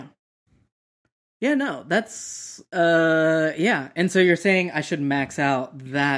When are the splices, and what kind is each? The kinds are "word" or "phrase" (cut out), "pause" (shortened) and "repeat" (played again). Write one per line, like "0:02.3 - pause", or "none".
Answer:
none

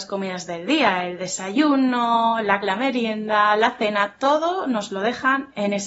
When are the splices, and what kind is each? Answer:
0:02.6 - word

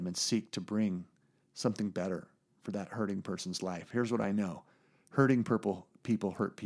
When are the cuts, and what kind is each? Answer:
none

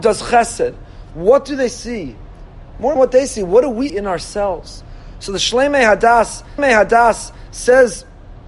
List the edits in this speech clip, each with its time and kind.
0:03.0 - phrase
0:03.9 - word
0:06.6 - repeat

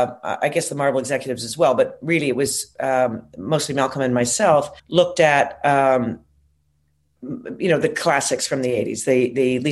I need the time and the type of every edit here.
0:04.8 - pause

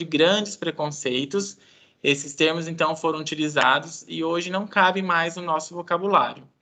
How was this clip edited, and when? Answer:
none

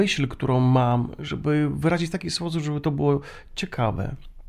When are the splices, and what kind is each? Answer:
none

